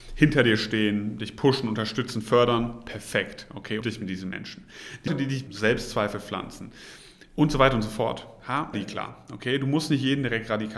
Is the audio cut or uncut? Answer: cut